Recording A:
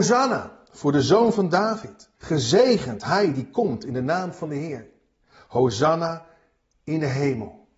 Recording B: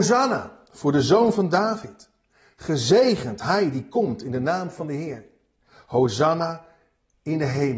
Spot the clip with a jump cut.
A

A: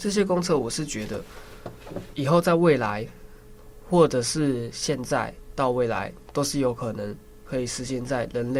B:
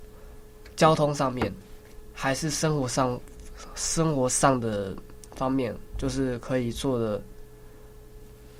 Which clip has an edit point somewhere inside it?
A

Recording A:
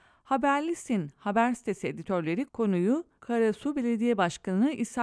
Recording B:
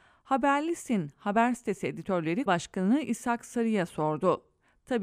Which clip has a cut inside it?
B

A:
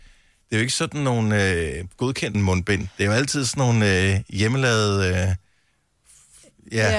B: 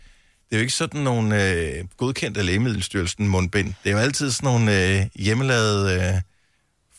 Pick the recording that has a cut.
A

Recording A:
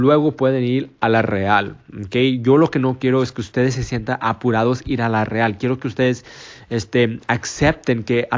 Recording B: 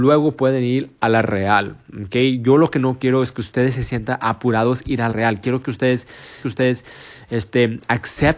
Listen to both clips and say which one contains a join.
B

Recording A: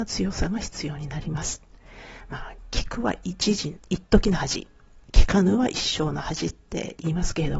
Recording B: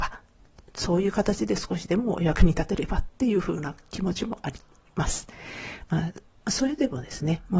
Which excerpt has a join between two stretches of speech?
A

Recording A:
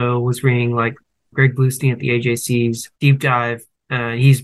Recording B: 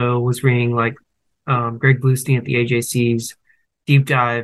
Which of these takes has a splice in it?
A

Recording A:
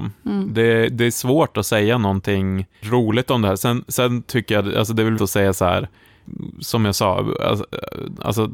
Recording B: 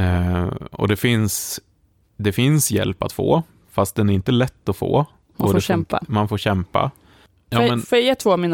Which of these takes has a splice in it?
A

